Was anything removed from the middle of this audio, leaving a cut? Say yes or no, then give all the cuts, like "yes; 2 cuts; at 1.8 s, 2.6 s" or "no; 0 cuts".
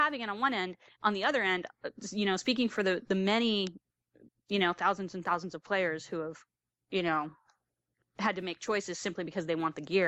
no; 0 cuts